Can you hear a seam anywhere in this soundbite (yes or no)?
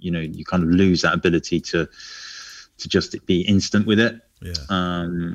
no